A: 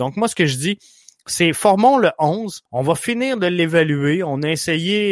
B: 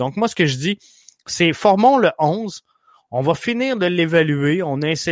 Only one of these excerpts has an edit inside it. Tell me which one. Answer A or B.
A